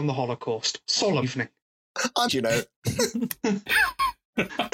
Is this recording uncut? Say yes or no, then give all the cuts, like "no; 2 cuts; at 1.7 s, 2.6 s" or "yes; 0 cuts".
no; 2 cuts; at 1.2 s, 2.3 s